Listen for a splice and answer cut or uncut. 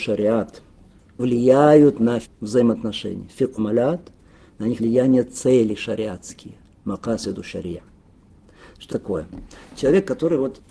cut